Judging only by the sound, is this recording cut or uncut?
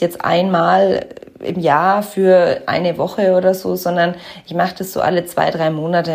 uncut